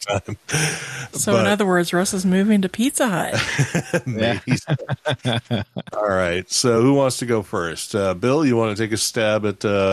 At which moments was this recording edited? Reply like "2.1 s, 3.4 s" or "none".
none